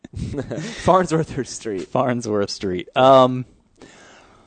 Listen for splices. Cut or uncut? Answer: cut